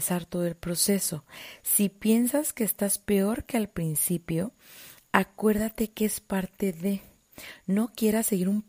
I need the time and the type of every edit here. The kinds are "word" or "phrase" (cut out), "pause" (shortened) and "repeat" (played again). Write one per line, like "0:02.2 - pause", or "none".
none